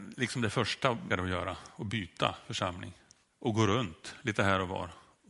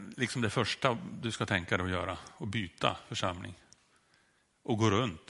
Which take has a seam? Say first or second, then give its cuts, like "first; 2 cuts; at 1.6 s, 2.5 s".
first; 2 cuts; at 1.1 s, 3.2 s